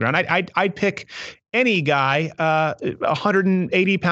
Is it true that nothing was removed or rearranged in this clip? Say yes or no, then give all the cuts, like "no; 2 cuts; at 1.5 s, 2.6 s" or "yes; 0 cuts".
yes; 0 cuts